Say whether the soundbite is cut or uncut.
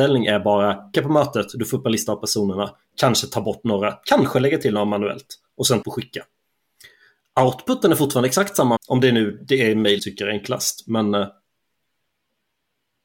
cut